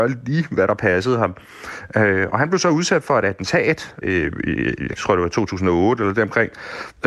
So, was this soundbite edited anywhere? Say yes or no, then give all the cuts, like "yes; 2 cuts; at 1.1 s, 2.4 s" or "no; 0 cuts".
yes; 2 cuts; at 4.0 s, 5.0 s